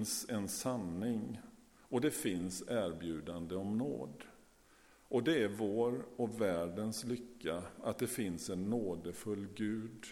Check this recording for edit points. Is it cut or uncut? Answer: uncut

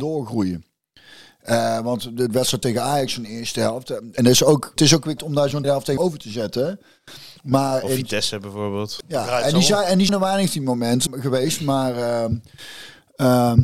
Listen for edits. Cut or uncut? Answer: cut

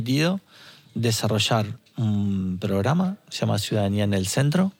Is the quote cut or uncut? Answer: uncut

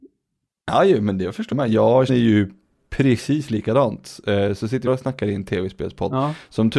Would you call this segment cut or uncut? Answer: cut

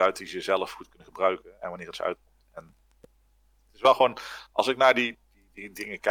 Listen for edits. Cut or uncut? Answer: uncut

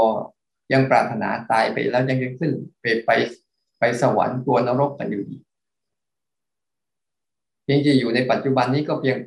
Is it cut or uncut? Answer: uncut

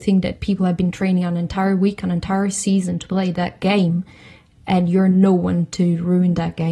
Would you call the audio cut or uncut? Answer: uncut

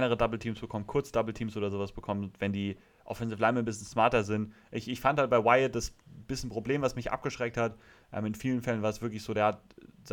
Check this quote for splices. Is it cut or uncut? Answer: uncut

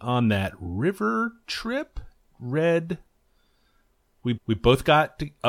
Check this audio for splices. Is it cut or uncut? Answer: cut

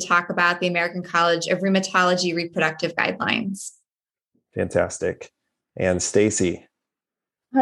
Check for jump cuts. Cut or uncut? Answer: uncut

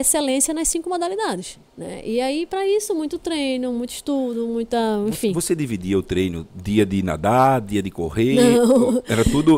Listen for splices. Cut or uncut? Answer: cut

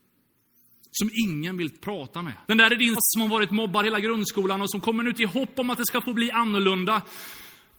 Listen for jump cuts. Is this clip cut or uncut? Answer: cut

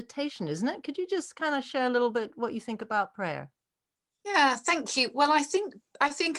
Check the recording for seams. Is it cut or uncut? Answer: uncut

